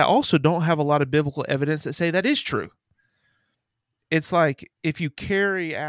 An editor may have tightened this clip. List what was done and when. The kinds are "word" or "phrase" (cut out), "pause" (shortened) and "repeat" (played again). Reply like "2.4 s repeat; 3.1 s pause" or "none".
none